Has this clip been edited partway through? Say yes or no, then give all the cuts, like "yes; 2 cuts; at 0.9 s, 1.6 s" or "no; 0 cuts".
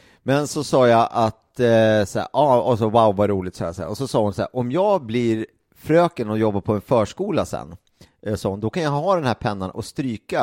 no; 0 cuts